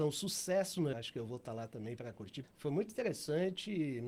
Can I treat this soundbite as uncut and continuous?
no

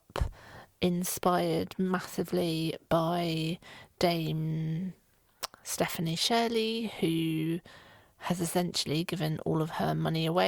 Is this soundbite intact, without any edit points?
yes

